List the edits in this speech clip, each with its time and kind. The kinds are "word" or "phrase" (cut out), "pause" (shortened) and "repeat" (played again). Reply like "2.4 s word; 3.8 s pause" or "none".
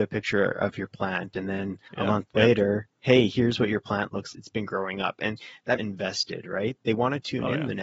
1.9 s pause; 2.9 s pause; 4.3 s phrase; 5.8 s phrase